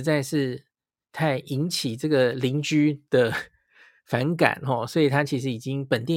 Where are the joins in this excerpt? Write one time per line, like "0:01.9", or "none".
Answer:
none